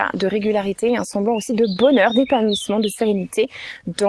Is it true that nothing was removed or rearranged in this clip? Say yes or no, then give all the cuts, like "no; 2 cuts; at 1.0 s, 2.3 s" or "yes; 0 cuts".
yes; 0 cuts